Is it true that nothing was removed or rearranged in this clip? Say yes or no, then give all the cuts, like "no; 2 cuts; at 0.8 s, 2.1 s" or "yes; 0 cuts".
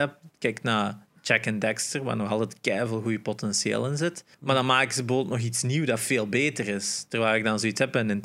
no; 1 cut; at 4.3 s